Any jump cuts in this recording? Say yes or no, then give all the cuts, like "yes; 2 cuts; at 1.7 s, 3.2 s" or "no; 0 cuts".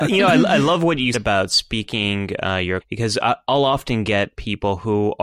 yes; 2 cuts; at 1.1 s, 2.8 s